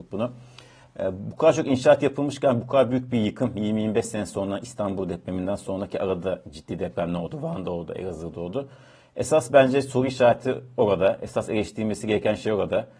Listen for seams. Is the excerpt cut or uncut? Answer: uncut